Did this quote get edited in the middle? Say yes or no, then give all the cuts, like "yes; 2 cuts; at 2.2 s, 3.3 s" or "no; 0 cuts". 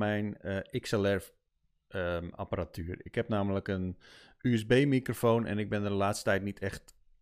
no; 0 cuts